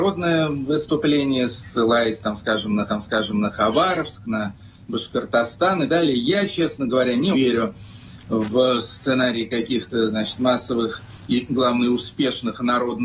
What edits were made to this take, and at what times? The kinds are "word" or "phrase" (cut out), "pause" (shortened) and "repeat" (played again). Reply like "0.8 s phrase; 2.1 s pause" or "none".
2.9 s repeat; 5.9 s word; 7.3 s word